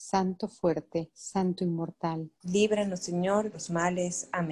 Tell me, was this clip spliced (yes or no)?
yes